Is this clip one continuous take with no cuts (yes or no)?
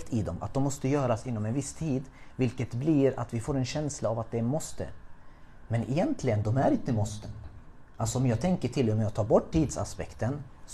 yes